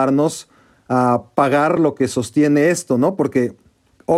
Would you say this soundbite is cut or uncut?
uncut